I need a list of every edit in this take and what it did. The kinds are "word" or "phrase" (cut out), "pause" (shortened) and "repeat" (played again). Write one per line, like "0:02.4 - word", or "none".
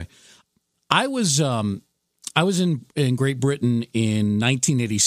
none